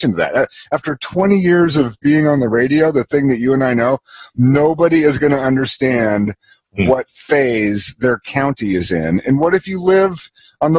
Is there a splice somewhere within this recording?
no; 0 cuts

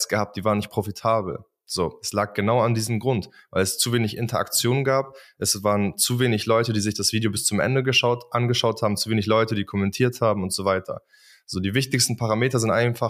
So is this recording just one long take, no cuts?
yes; 0 cuts

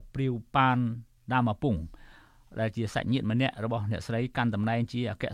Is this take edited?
no; 0 cuts

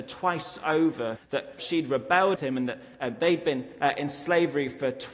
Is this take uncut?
no; 3 cuts; at 1.2 s, 1.6 s, 2.4 s

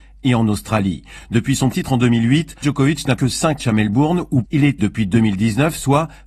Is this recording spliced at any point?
yes; 6 cuts; at 1.7 s, 2.6 s, 3.2 s, 3.6 s, 4.4 s, 4.8 s

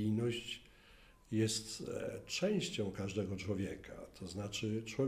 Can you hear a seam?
no; 0 cuts

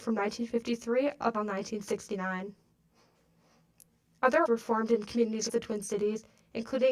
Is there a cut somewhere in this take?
yes; 3 cuts; at 1.3 s, 4.5 s, 5.5 s

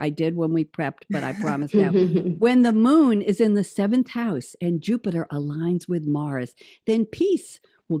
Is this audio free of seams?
yes; 0 cuts

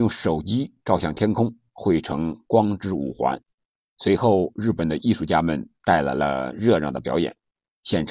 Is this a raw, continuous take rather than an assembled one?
yes; 0 cuts

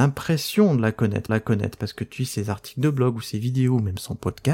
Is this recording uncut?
no; 2 cuts; at 1.3 s, 2.2 s

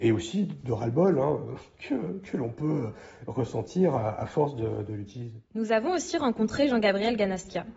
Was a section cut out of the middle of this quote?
yes; 1 cut; at 5.4 s

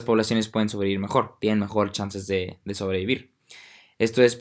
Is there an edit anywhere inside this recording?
no; 0 cuts

